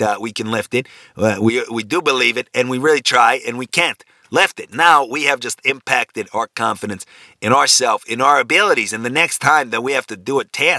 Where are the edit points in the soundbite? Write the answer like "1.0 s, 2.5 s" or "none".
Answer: none

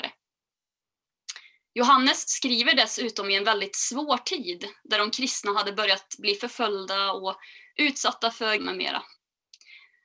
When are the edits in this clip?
8.6 s

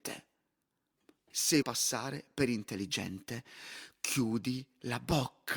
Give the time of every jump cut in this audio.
1.6 s

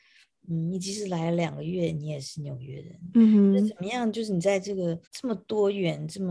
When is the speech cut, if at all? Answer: 5.0 s

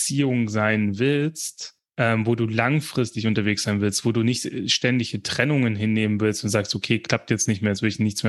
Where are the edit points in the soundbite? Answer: 1.9 s

